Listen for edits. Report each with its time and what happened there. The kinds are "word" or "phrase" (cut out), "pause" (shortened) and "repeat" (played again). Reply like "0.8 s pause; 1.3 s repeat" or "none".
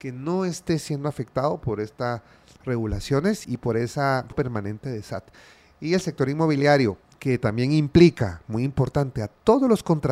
3.4 s word; 4.3 s phrase